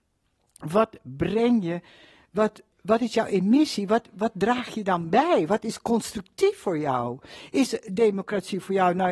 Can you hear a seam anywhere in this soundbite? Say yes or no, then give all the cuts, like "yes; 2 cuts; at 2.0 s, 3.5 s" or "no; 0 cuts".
no; 0 cuts